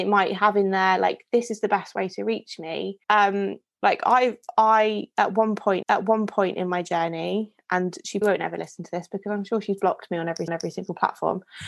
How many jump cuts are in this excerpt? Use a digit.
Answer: 4